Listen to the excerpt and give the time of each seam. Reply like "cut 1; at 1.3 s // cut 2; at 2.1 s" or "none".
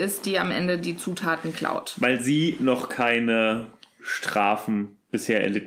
none